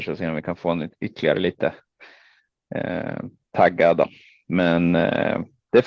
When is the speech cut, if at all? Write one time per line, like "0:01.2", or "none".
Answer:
none